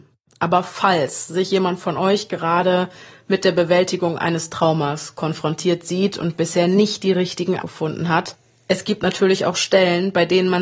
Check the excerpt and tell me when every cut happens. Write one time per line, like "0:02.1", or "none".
0:07.6